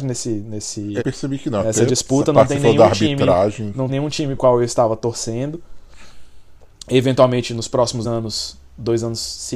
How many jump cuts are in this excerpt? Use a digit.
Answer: 4